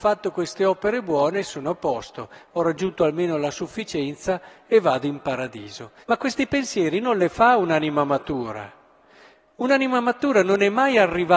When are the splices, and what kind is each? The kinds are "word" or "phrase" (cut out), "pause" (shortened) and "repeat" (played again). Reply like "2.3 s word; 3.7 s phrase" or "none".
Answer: 6.0 s pause